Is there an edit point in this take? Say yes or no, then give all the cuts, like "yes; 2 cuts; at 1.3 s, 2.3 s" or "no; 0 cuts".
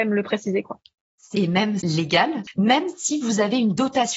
yes; 2 cuts; at 1.3 s, 1.8 s